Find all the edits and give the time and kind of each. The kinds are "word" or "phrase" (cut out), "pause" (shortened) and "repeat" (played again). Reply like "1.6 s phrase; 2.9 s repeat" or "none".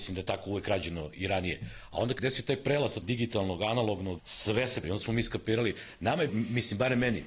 2.2 s word; 3.0 s word; 4.2 s word; 4.8 s word; 6.3 s word